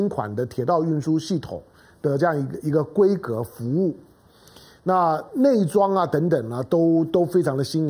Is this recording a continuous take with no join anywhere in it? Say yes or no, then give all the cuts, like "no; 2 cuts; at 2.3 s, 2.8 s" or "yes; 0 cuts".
yes; 0 cuts